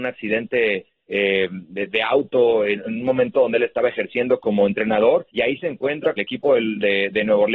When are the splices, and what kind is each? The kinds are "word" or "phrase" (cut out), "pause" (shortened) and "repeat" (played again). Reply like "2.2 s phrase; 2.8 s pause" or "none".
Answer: 5.3 s pause; 6.2 s phrase